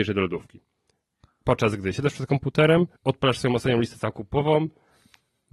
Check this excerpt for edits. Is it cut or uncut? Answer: cut